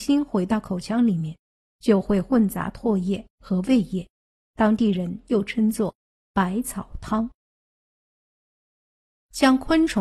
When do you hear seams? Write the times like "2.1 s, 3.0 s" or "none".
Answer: none